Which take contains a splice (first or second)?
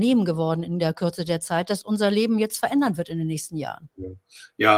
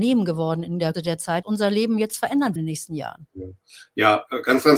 second